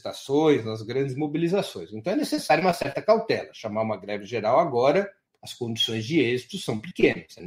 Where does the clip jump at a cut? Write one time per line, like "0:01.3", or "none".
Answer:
0:05.3